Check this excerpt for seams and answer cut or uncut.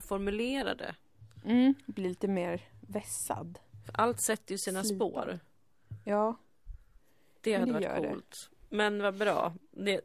uncut